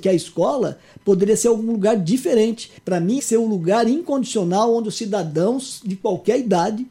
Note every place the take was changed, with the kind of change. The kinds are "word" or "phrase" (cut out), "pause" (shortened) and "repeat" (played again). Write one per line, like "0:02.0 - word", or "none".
0:02.8 - pause
0:03.2 - phrase

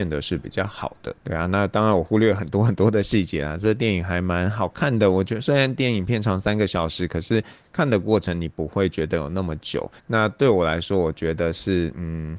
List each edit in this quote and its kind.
0:01.2 - pause
0:10.0 - pause

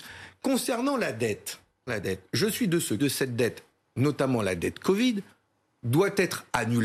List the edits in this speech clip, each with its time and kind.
0:01.9 - word
0:03.0 - phrase

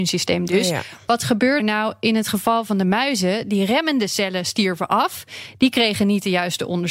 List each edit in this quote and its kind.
0:01.6 - word

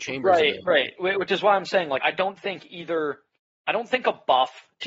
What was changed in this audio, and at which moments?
0:02.0 - word

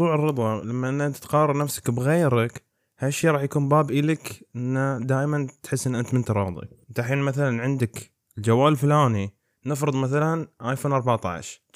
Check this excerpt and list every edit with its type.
none

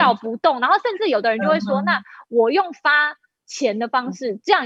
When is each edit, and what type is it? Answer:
none

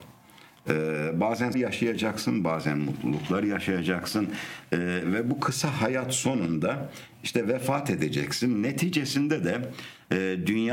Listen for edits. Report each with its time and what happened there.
0:01.5 - word

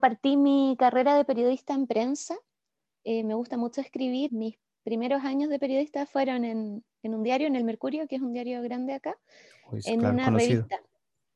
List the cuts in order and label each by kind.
0:04.3 - word

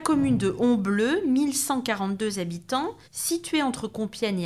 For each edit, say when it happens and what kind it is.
0:03.0 - pause

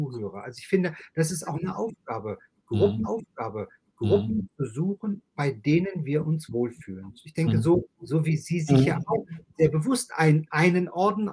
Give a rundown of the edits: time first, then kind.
0:03.0 - repeat
0:05.3 - pause
0:07.9 - pause

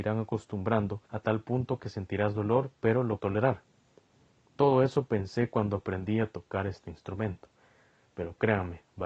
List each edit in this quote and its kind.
0:01.1 - pause
0:03.2 - word

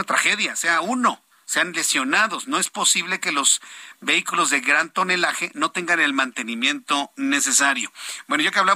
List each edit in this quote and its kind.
0:01.3 - pause

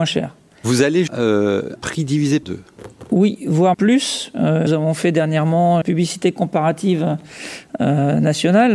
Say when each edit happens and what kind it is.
0:01.1 - word
0:01.8 - word
0:02.4 - word
0:03.7 - word
0:04.7 - word
0:05.8 - word

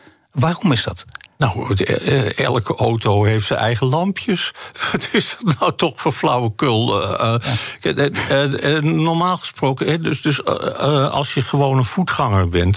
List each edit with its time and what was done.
0:01.3 - pause

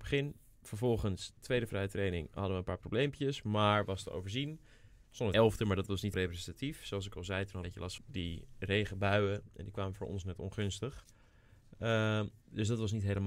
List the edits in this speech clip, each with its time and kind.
0:01.4 - word
0:05.3 - word
0:06.1 - word
0:07.6 - word
0:08.0 - word

